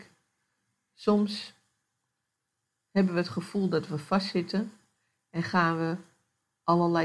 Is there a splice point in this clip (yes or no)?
no